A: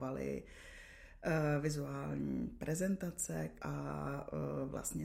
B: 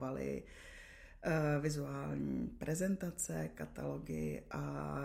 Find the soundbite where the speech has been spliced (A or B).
A